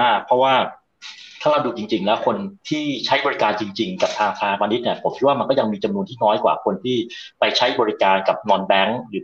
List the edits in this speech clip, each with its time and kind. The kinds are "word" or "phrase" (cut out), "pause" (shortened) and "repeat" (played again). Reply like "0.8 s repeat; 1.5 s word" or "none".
2.6 s pause